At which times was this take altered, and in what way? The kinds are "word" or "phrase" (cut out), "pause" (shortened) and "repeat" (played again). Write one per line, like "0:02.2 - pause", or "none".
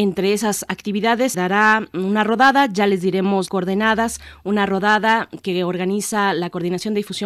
0:01.3 - word
0:01.9 - word
0:03.5 - word